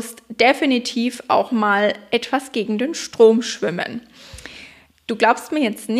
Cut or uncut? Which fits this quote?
uncut